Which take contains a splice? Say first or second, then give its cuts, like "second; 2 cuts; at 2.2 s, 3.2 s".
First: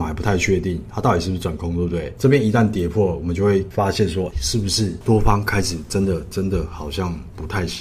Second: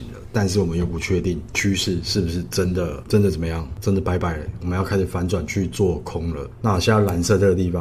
first; 1 cut; at 4.3 s